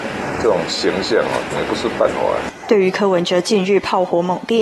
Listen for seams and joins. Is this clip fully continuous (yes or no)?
no